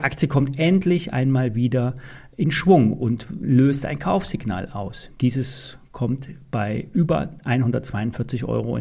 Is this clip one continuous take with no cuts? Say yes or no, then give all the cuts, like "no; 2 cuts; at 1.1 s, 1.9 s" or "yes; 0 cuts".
yes; 0 cuts